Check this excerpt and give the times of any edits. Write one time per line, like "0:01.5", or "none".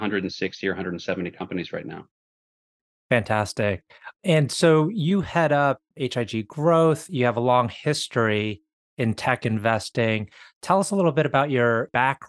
none